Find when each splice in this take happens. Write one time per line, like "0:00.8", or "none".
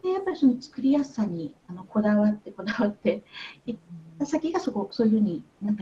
none